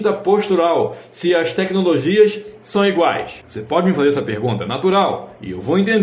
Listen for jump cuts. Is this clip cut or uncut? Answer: uncut